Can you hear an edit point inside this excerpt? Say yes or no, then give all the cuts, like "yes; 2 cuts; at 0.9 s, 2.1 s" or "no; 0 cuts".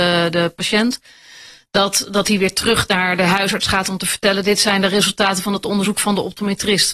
no; 0 cuts